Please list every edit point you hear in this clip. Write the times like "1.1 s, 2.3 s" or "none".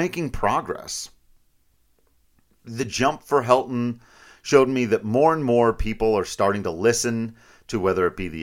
none